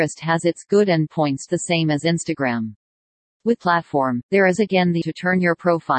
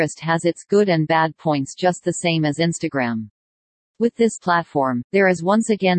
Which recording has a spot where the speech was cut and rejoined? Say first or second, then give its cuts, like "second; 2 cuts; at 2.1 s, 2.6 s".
first; 5 cuts; at 1.1 s, 1.5 s, 3.6 s, 4.6 s, 5.0 s